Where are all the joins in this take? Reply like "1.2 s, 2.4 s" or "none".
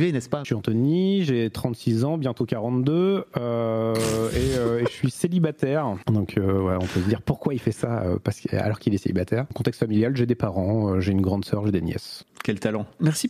none